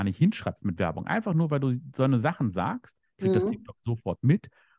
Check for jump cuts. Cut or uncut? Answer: uncut